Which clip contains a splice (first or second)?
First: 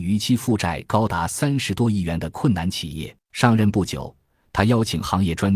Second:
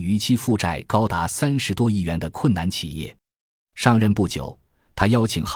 first